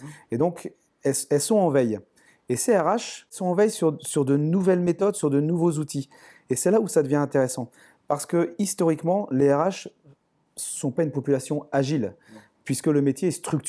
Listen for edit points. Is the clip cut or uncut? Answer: uncut